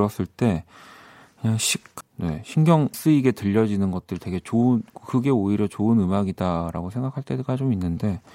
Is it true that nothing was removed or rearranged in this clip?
no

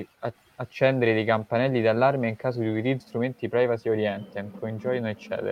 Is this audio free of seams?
no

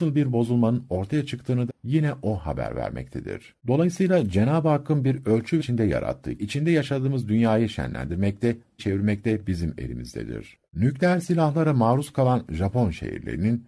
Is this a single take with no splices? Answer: no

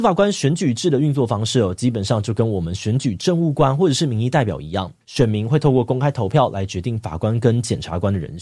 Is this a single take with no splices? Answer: no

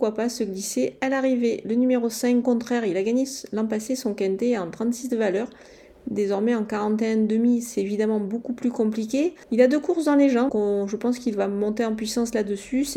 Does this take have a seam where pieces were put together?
yes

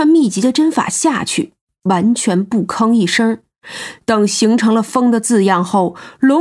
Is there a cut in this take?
no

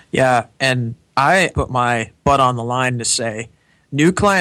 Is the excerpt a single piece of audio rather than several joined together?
no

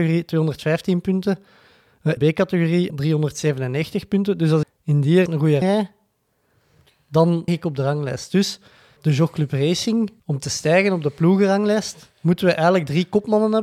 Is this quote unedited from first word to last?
no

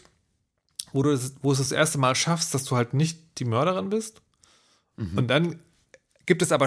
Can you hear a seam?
no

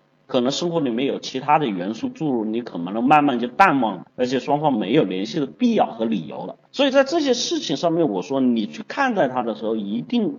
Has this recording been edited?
yes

